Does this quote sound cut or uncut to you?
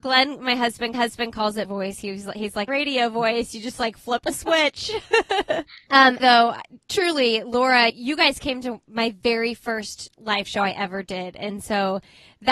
cut